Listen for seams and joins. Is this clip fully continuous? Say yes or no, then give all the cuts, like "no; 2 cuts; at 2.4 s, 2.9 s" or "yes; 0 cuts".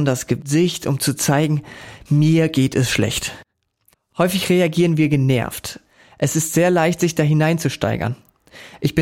yes; 0 cuts